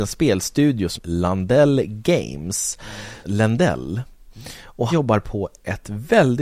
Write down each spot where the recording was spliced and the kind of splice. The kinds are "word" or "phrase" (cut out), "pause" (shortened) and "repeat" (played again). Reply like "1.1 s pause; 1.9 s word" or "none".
1.0 s word; 3.2 s phrase; 4.9 s word